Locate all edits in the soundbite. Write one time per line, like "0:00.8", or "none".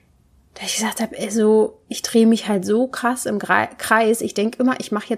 none